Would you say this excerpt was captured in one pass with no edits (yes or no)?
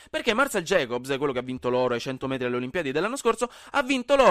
yes